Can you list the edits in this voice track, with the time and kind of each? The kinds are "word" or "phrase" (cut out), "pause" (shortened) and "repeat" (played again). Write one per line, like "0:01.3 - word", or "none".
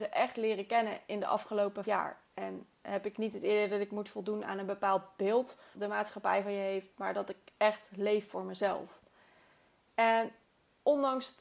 0:01.8 - word
0:05.7 - word